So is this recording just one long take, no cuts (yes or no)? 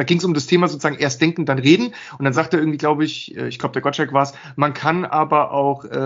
yes